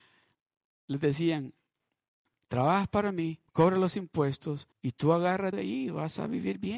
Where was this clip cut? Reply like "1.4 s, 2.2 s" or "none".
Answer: 3.5 s, 4.7 s, 5.5 s